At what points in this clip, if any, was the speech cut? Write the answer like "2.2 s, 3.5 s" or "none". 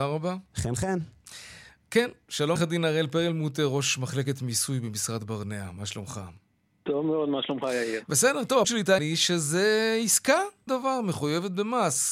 2.6 s, 8.6 s, 9.0 s, 10.7 s

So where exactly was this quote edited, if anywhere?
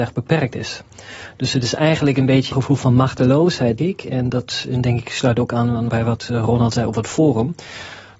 2.5 s, 3.8 s, 5.9 s

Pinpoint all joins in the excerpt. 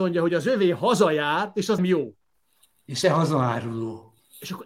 1.8 s, 3.0 s

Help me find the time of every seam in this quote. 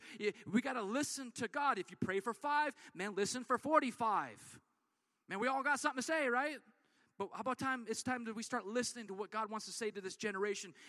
none

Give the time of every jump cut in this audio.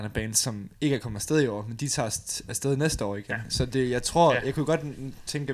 3.7 s

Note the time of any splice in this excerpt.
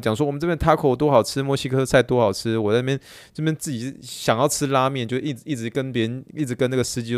none

